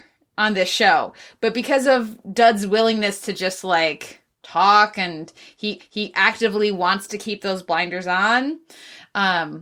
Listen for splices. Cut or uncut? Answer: cut